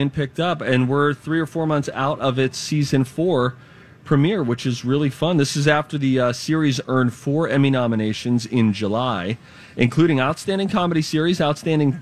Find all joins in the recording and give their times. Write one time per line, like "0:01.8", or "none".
none